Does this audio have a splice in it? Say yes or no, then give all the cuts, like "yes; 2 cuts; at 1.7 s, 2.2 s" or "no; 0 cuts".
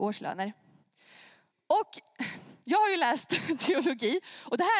no; 0 cuts